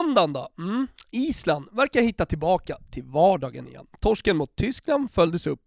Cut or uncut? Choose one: uncut